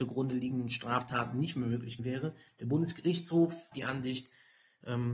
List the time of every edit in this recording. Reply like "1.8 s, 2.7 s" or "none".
2.0 s, 3.7 s